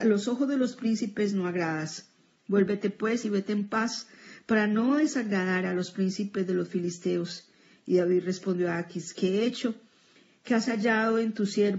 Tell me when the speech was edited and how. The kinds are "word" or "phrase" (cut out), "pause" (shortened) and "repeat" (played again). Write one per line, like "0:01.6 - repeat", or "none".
none